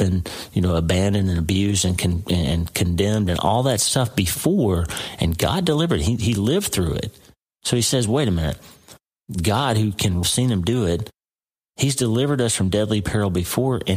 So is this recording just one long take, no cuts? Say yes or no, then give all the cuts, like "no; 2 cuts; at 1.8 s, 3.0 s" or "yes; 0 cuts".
no; 1 cut; at 10.2 s